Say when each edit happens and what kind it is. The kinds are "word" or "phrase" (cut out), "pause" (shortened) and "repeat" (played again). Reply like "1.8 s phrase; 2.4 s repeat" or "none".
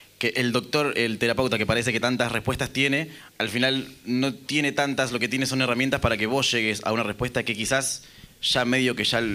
0.9 s word